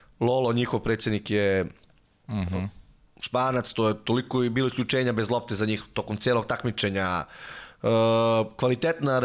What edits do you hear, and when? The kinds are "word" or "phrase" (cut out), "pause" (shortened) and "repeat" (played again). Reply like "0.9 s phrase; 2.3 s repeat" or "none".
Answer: none